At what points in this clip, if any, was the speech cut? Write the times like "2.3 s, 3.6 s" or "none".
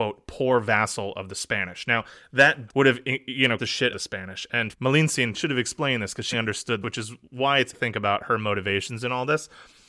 2.7 s, 3.6 s, 3.9 s, 4.7 s, 5.3 s, 6.3 s, 6.8 s, 7.7 s